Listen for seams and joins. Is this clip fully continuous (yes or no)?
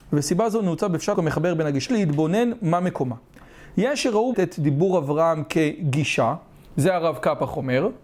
no